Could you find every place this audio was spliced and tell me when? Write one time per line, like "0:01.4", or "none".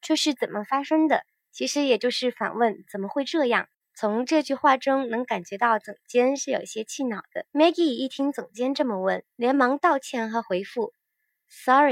0:01.3
0:07.5
0:09.3